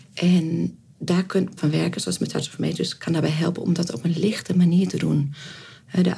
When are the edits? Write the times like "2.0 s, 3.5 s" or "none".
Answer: 1.6 s, 3.0 s